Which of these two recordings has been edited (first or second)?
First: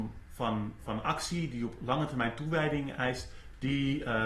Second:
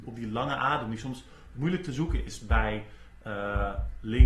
second